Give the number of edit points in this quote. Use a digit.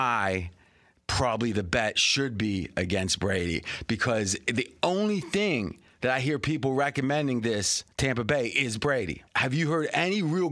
2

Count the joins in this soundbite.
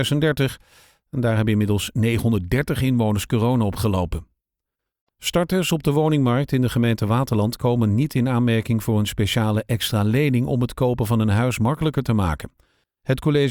0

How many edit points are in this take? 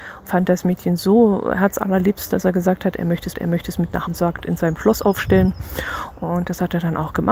3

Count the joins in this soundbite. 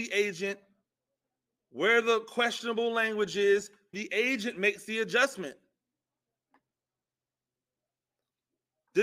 1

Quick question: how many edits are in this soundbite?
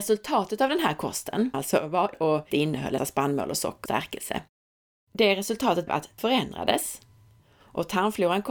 7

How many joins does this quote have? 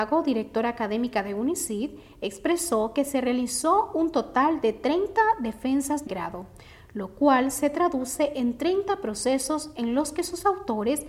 1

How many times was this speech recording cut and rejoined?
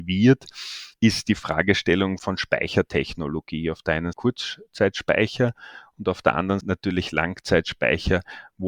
4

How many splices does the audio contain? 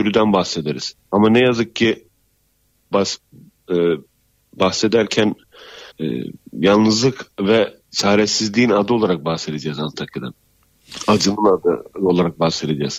4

